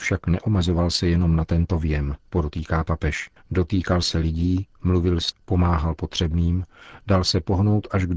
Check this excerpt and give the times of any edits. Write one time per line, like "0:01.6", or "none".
0:02.2
0:03.4
0:05.3